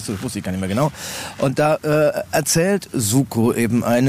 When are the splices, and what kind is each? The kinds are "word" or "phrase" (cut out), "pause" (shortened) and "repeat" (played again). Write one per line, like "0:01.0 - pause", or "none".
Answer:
none